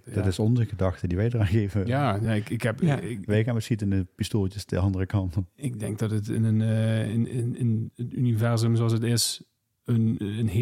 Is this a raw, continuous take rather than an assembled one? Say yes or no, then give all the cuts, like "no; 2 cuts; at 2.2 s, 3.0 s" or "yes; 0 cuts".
yes; 0 cuts